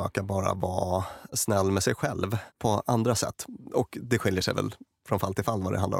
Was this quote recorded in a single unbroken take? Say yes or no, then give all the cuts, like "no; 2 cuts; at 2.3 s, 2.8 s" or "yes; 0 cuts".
yes; 0 cuts